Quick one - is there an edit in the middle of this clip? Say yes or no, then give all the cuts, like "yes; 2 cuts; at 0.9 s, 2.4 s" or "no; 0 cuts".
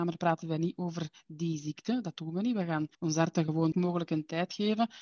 yes; 2 cuts; at 2.9 s, 3.7 s